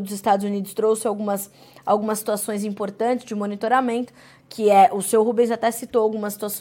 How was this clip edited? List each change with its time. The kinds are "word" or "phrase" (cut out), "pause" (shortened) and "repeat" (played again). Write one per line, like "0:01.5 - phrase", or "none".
none